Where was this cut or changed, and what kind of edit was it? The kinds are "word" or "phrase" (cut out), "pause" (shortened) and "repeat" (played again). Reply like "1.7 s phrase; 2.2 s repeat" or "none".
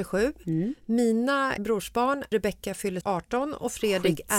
1.6 s word; 3.0 s word